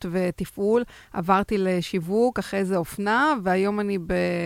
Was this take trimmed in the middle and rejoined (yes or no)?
no